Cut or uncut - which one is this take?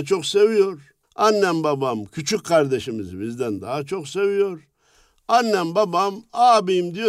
cut